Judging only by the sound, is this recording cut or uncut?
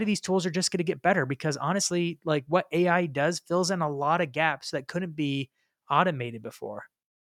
uncut